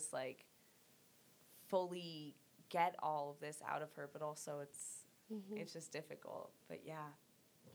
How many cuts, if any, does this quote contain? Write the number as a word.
one